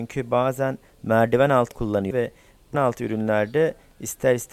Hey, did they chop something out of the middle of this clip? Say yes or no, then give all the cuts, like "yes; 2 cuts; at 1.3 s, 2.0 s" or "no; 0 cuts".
yes; 3 cuts; at 1.7 s, 2.1 s, 2.7 s